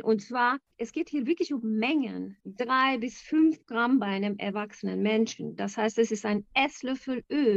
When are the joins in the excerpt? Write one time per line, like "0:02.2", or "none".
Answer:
0:02.4